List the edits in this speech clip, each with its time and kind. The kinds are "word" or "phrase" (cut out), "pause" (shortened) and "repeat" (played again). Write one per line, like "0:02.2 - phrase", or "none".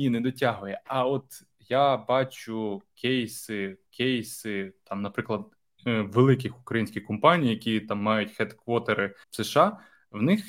0:03.9 - repeat
0:09.2 - pause